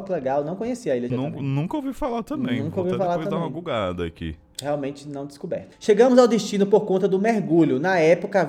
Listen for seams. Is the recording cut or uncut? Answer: cut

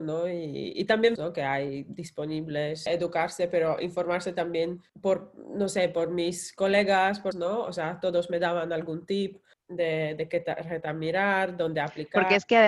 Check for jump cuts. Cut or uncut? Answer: cut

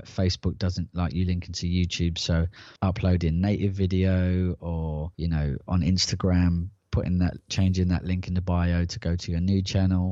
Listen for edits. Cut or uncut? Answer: cut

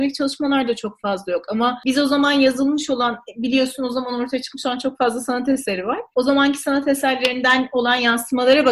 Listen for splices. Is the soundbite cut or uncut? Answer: uncut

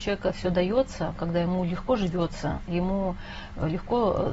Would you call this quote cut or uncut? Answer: uncut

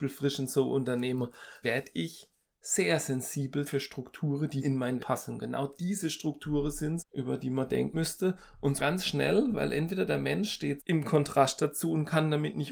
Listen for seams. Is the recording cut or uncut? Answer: cut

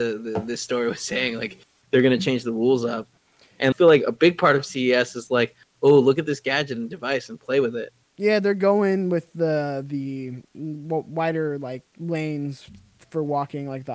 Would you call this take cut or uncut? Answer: cut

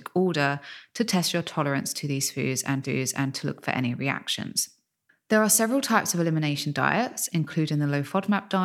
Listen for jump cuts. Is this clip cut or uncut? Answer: cut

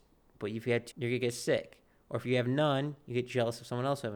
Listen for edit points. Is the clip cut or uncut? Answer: cut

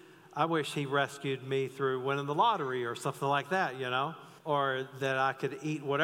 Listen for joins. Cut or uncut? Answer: cut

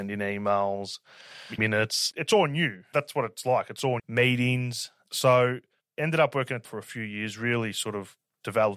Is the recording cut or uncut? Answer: cut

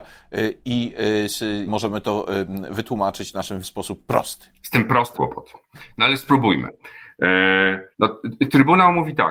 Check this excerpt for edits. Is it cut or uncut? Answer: cut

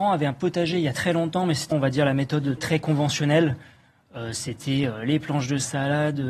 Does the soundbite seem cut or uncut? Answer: cut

